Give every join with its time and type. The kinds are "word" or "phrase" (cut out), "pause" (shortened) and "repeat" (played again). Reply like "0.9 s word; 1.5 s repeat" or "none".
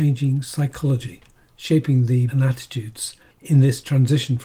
2.3 s word